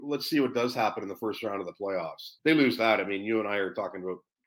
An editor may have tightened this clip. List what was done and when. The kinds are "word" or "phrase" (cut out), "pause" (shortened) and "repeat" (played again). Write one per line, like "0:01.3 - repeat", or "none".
0:02.4 - pause